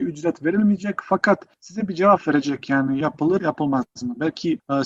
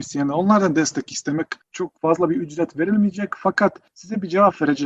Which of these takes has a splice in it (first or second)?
first